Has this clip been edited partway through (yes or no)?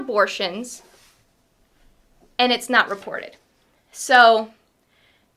no